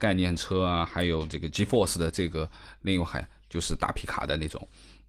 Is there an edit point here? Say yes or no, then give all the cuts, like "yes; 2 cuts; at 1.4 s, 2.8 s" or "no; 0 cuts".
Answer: no; 0 cuts